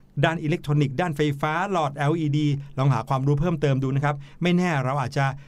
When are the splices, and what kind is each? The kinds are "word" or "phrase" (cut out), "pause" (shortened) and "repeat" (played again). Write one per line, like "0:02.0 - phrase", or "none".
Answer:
none